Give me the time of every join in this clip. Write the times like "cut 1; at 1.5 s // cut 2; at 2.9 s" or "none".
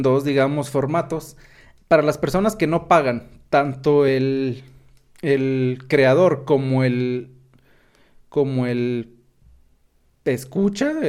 none

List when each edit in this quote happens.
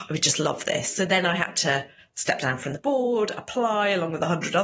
none

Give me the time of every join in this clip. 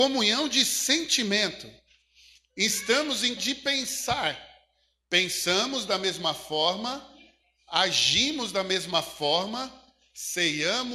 cut 1; at 3.4 s

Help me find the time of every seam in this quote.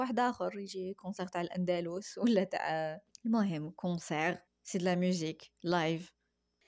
cut 1; at 3.1 s // cut 2; at 4.5 s

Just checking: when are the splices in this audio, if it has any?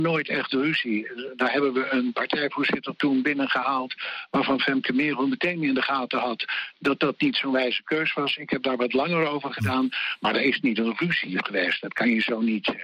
none

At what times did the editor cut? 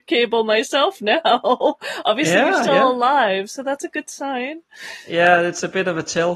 none

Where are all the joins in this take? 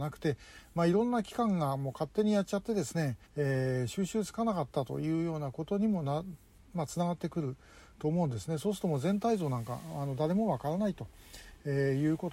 cut 1; at 3.3 s

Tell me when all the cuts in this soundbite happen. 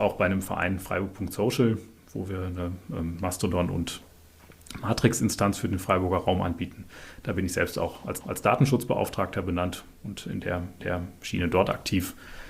cut 1; at 8.2 s // cut 2; at 10.8 s

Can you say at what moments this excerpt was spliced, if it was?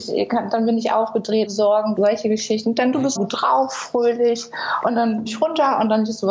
cut 1; at 1.5 s // cut 2; at 2.0 s // cut 3; at 3.2 s // cut 4; at 5.3 s

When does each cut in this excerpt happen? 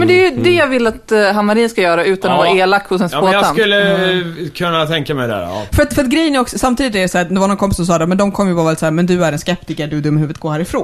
none

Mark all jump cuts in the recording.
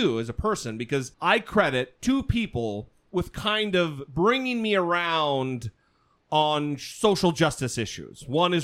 cut 1; at 1.1 s

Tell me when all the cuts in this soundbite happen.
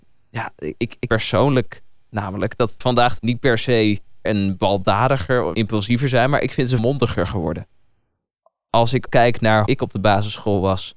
cut 1; at 1.1 s // cut 2; at 2.8 s // cut 3; at 3.2 s // cut 4; at 4.2 s // cut 5; at 5.5 s // cut 6; at 6.8 s // cut 7; at 9.1 s // cut 8; at 9.7 s

